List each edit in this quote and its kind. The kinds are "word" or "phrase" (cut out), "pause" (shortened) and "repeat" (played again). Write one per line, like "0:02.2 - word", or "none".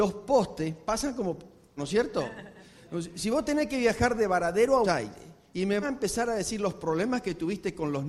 0:01.8 - word
0:04.8 - word
0:05.8 - word